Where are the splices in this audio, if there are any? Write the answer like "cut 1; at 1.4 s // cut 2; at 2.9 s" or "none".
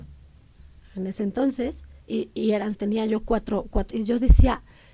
cut 1; at 2.0 s // cut 2; at 2.7 s // cut 3; at 3.9 s